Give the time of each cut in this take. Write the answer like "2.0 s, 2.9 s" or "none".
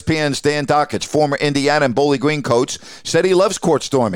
none